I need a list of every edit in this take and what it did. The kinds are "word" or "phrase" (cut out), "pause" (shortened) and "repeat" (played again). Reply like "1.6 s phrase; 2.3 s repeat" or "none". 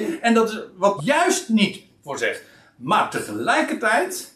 1.0 s word